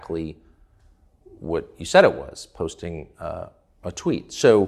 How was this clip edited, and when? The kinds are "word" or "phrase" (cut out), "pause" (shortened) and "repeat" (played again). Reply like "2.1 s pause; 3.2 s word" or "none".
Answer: none